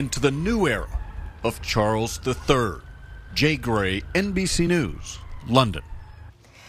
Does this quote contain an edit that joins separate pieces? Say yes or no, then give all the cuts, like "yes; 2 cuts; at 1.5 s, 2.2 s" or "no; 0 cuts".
no; 0 cuts